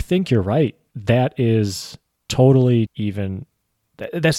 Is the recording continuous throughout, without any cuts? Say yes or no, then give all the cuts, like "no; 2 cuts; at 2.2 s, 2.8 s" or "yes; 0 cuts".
no; 2 cuts; at 0.9 s, 2.9 s